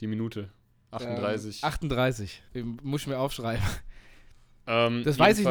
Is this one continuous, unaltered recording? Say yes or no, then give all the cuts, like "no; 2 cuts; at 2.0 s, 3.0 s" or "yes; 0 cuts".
no; 1 cut; at 2.5 s